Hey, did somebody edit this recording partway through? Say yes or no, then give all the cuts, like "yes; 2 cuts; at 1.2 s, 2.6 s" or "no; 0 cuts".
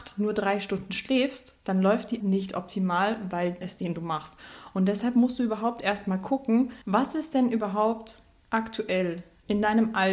yes; 3 cuts; at 2.2 s, 3.6 s, 6.8 s